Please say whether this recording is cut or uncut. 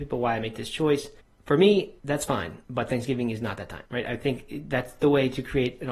cut